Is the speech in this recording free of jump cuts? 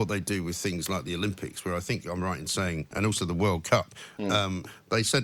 yes; 0 cuts

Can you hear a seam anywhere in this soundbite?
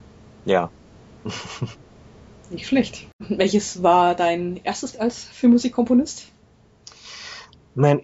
yes; 1 cut; at 4.9 s

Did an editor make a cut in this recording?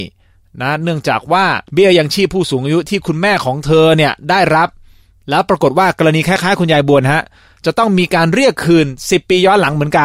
yes; 1 cut; at 1.7 s

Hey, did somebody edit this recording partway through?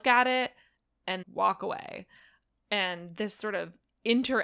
yes; 1 cut; at 1.2 s

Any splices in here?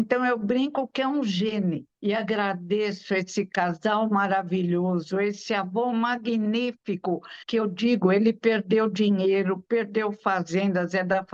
yes; 2 cuts; at 1.9 s, 7.4 s

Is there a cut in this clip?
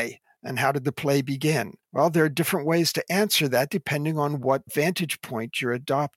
yes; 1 cut; at 1.8 s

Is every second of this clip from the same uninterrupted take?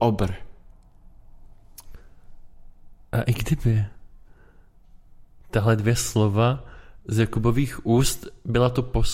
yes; 0 cuts

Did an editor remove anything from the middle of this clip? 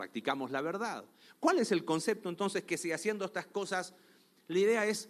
no; 0 cuts

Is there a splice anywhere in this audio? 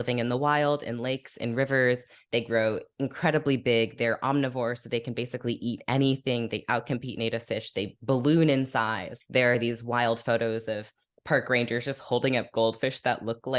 no; 0 cuts

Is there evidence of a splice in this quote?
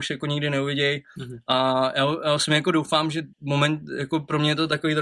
yes; 1 cut; at 3.3 s

